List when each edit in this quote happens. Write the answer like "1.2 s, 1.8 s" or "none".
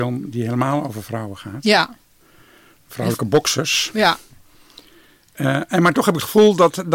none